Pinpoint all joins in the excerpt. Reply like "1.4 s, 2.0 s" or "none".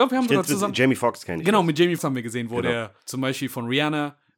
2.0 s, 3.0 s